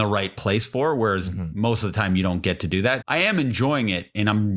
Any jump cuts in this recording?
yes; 1 cut; at 3.0 s

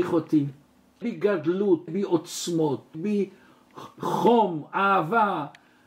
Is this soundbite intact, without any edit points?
no; 3 cuts; at 1.0 s, 1.9 s, 2.9 s

